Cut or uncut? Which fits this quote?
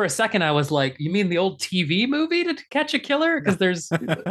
uncut